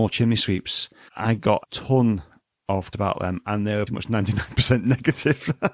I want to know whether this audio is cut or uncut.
cut